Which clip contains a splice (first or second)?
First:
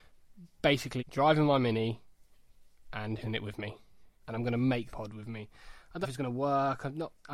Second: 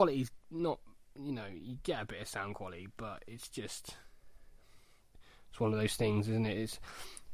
first